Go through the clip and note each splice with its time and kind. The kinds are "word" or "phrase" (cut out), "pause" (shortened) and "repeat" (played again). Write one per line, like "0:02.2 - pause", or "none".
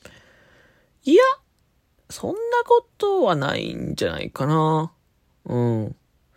none